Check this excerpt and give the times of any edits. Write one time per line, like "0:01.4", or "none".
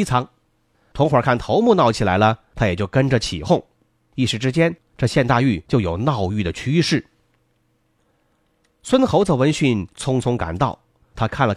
none